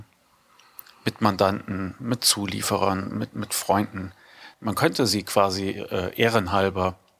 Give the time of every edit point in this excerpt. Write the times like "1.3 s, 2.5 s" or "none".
4.5 s